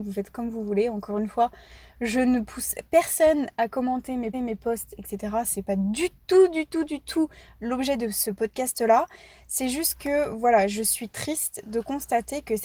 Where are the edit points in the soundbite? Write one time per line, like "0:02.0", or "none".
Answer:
0:04.3